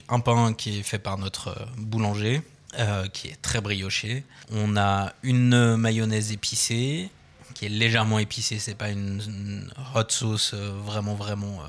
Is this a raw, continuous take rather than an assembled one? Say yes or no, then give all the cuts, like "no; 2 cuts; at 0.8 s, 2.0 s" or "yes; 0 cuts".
yes; 0 cuts